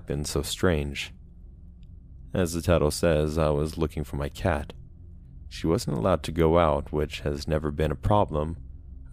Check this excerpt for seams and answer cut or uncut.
uncut